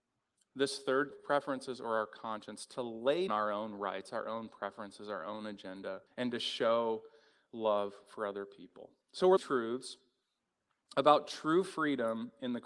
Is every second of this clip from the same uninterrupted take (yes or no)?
no